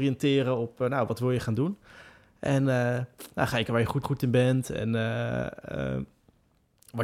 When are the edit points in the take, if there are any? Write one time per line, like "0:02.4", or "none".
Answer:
0:03.7
0:04.0